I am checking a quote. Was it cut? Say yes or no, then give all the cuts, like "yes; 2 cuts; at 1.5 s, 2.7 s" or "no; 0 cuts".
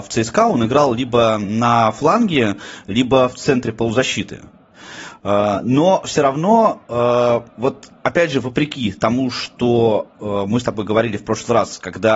no; 0 cuts